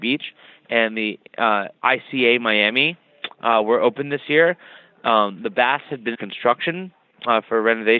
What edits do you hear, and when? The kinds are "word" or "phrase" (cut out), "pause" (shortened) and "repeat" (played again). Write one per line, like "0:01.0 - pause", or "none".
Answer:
0:06.1 - word